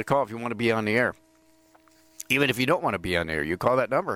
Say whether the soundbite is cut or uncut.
uncut